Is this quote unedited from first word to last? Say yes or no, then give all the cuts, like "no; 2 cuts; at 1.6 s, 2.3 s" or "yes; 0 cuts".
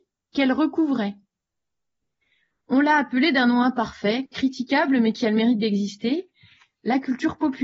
yes; 0 cuts